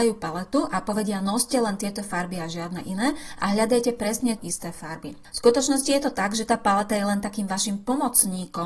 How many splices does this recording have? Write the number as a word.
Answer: one